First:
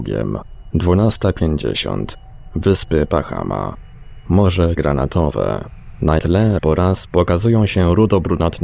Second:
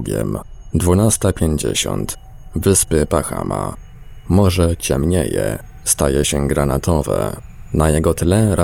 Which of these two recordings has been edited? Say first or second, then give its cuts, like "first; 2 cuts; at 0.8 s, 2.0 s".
first; 3 cuts; at 4.8 s, 6.2 s, 6.6 s